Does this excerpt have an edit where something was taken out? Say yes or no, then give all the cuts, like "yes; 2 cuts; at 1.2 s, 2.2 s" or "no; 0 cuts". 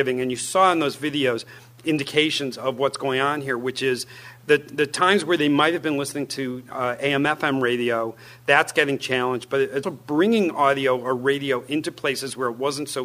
yes; 1 cut; at 9.8 s